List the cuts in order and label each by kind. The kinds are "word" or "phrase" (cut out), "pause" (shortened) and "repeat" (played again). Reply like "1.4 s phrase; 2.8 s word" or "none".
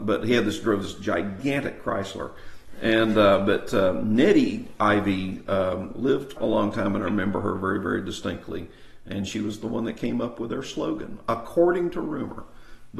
6.4 s word

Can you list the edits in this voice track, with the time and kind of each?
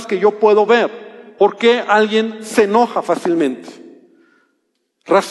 none

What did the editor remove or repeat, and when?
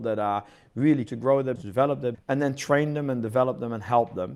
1.1 s word; 1.6 s word; 2.1 s word

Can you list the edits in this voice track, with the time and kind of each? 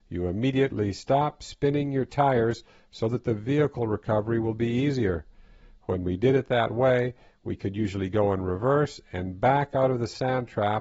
none

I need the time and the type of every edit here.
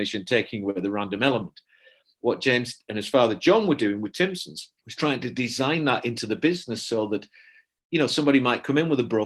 4.8 s pause

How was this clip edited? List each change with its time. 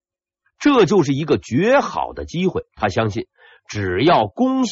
2.7 s pause

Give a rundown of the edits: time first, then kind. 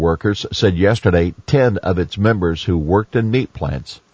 none

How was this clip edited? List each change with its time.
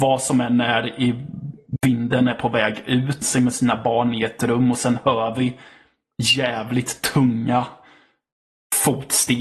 3.2 s phrase

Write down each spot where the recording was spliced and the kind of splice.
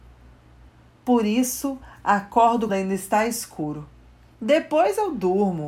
2.7 s word

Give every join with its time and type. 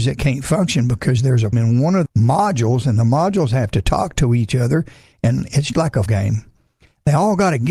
1.5 s word; 2.1 s word; 5.7 s word; 6.1 s word

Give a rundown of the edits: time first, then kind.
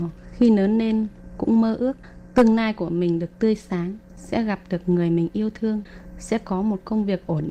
none

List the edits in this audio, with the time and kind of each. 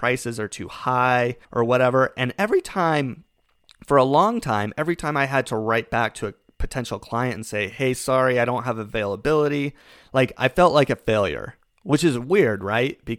1.4 s pause

